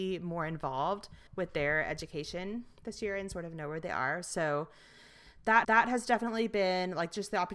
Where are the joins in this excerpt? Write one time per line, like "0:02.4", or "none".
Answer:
0:01.3
0:05.6